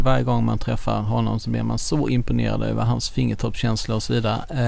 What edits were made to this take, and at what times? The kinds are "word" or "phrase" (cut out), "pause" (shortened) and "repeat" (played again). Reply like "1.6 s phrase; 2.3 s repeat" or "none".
none